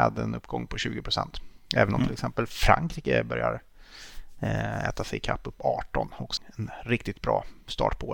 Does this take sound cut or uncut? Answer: cut